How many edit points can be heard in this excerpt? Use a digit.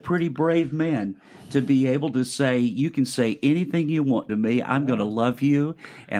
1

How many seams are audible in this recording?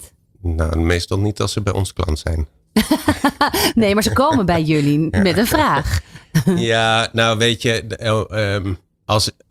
0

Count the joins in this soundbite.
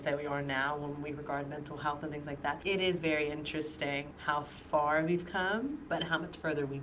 0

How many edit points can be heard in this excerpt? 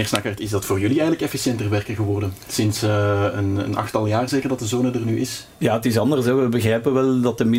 1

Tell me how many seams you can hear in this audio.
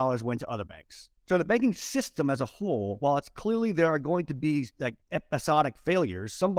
2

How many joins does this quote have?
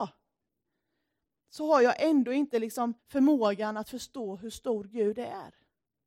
1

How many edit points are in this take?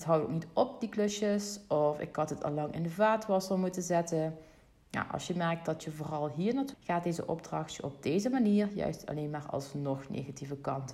1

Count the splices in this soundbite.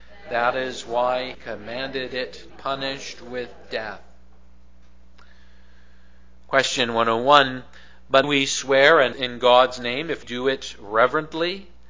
5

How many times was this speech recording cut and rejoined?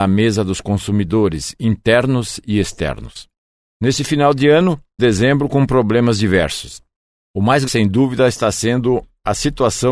2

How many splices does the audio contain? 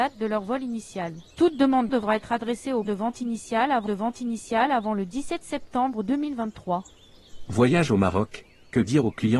4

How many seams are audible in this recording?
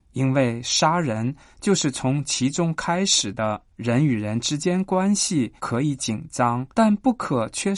3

